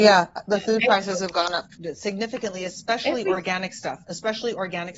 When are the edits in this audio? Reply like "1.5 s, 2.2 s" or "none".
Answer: none